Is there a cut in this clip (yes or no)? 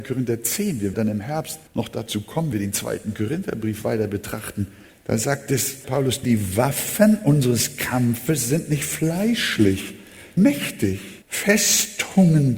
yes